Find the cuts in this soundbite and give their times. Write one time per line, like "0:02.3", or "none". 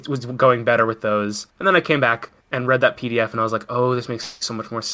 0:01.5
0:02.4